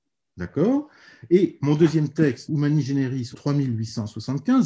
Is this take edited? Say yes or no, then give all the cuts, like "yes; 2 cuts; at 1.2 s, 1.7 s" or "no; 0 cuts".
yes; 2 cuts; at 2.5 s, 3.3 s